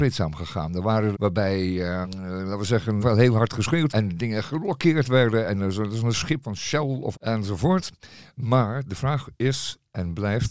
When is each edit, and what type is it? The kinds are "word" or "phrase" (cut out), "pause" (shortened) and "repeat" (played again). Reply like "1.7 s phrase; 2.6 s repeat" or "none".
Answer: 1.1 s word; 2.0 s word; 3.0 s word; 3.9 s word; 6.4 s word; 7.1 s word